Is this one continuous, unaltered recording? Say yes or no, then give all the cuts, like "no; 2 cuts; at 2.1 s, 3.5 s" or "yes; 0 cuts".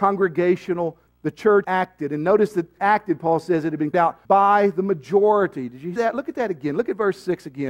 no; 6 cuts; at 1.1 s, 1.6 s, 2.8 s, 3.9 s, 4.2 s, 6.0 s